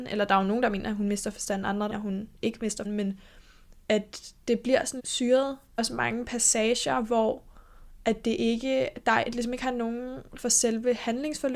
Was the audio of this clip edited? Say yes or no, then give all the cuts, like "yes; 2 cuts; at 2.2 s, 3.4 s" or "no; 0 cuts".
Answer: yes; 6 cuts; at 1.9 s, 2.8 s, 4.4 s, 5.0 s, 5.8 s, 10.4 s